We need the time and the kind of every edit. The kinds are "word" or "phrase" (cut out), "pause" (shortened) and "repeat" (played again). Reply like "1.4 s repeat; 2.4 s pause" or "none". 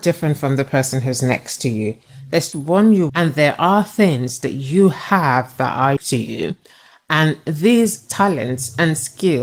2.5 s word; 3.1 s word; 6.0 s word